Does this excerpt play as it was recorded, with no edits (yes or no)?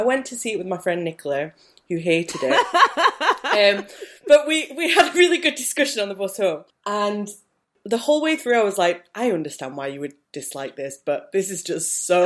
yes